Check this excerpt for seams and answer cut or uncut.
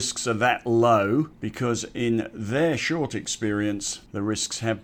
uncut